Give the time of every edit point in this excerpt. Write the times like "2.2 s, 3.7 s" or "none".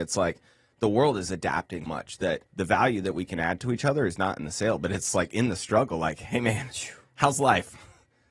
1.9 s, 2.5 s